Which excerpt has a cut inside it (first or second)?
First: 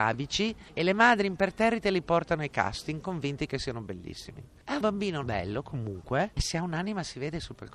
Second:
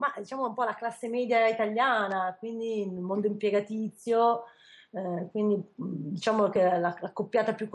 first